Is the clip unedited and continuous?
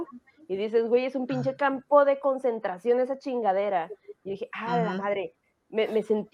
yes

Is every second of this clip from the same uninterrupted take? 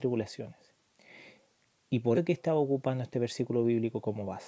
no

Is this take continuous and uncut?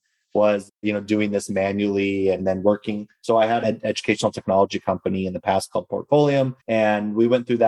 no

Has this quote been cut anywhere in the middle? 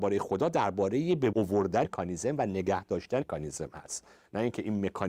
yes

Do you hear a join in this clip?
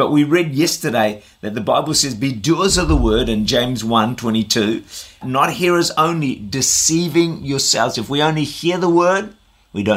yes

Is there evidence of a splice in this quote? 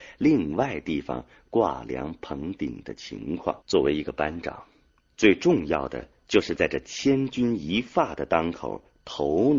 yes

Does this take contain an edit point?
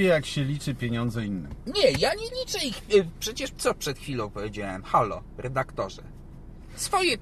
no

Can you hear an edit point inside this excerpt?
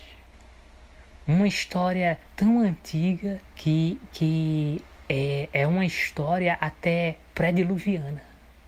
yes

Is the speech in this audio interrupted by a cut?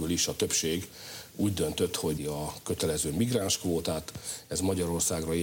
yes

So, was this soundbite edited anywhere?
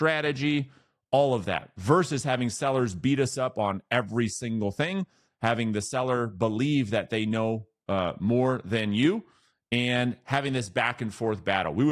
no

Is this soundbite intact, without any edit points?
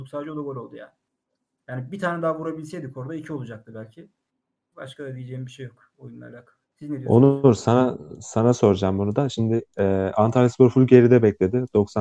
no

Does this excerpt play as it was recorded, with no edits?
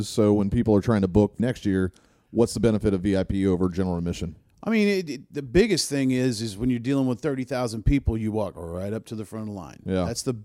no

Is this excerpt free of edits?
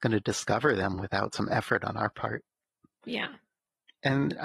yes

